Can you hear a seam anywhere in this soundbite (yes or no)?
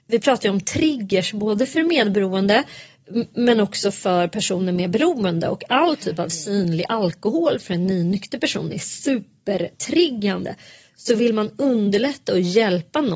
no